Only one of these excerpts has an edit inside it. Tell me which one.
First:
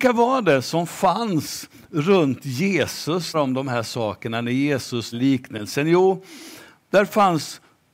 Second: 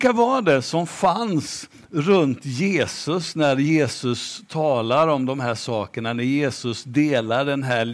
first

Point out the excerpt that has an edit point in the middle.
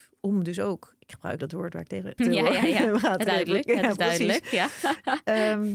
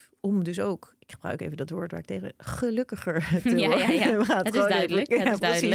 first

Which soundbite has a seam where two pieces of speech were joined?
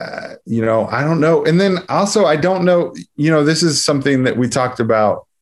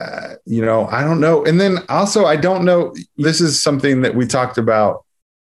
second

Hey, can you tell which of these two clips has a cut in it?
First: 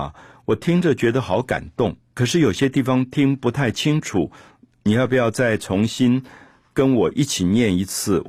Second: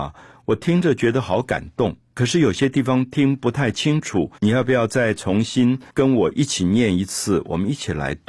second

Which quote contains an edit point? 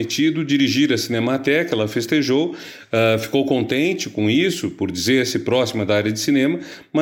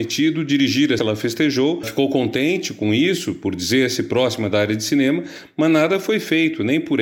second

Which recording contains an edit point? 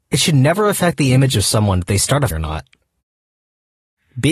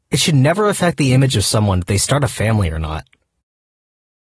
first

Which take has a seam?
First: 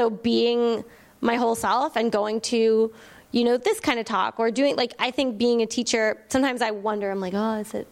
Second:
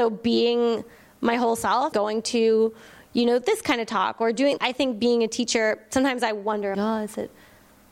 second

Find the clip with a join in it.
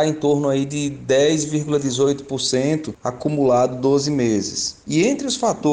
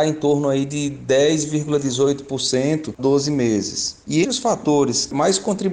second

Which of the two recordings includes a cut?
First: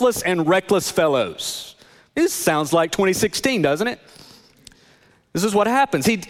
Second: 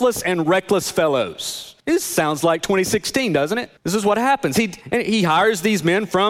second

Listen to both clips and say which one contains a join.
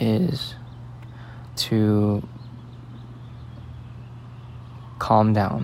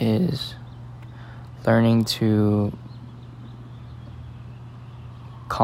first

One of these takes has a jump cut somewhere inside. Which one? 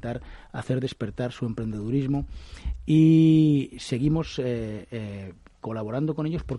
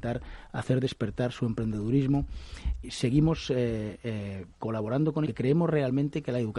second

